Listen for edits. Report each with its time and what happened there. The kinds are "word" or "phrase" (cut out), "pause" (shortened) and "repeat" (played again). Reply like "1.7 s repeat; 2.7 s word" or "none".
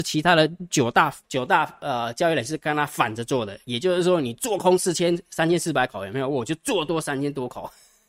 1.2 s pause